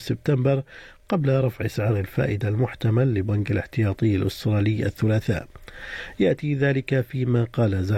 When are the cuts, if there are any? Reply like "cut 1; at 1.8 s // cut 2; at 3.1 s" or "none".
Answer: none